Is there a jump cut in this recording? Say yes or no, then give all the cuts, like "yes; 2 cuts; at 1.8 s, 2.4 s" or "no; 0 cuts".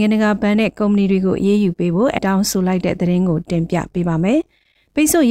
yes; 1 cut; at 2.2 s